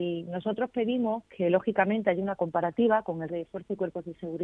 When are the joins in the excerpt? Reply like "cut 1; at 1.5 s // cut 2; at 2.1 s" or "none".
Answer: cut 1; at 3.3 s